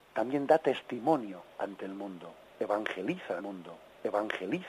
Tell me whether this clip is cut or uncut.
cut